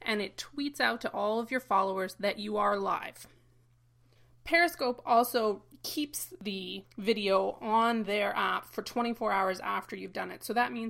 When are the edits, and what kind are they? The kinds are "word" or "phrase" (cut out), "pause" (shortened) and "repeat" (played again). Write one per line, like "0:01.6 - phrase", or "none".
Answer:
none